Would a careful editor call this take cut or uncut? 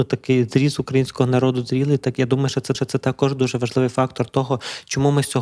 cut